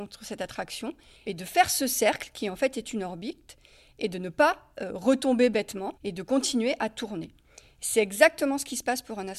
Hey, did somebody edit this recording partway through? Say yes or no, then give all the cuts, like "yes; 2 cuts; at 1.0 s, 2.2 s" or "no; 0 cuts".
yes; 2 cuts; at 1.2 s, 6.0 s